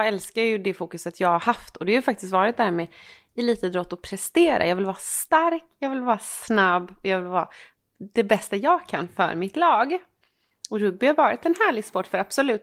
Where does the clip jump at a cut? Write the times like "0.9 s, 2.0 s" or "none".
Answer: none